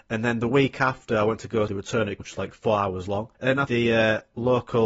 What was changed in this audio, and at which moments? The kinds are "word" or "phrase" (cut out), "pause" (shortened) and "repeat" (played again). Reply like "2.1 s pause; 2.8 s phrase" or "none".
1.7 s word; 2.2 s word; 3.3 s pause; 3.7 s phrase